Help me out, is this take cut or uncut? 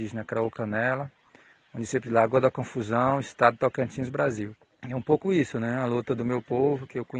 uncut